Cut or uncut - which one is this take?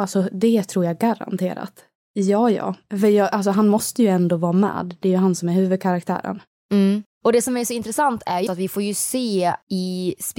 cut